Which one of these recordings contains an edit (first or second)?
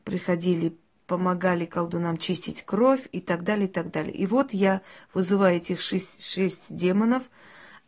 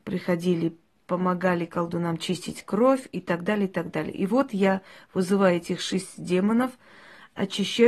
second